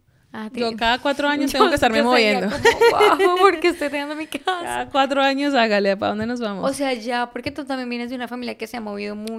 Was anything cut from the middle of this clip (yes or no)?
no